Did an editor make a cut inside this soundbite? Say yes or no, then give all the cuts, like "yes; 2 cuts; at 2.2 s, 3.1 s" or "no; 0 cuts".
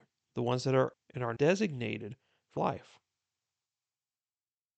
yes; 3 cuts; at 0.9 s, 1.4 s, 2.6 s